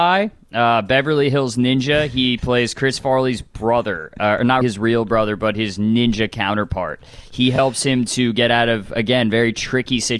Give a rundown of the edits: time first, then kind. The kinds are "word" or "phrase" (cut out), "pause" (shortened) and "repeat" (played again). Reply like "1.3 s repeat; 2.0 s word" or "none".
4.6 s word